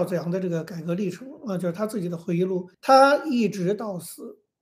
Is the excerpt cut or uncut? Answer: cut